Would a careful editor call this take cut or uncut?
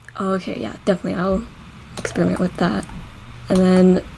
uncut